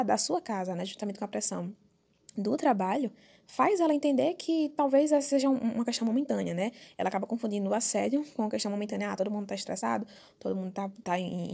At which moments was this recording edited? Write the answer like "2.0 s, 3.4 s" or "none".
none